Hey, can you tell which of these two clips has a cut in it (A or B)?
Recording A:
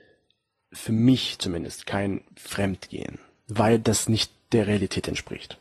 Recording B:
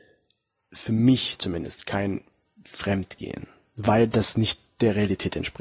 A